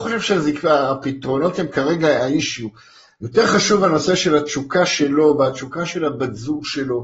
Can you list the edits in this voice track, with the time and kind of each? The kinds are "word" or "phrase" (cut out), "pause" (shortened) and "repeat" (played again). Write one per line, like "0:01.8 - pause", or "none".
none